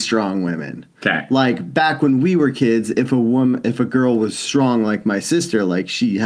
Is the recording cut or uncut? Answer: uncut